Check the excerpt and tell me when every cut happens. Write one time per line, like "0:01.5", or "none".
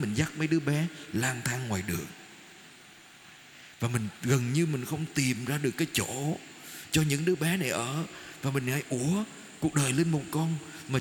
none